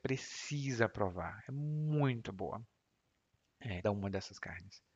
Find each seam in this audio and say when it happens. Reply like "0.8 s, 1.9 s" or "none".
2.3 s, 3.8 s